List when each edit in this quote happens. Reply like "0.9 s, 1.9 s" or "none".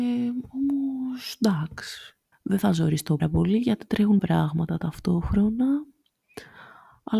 2.3 s, 3.2 s, 4.2 s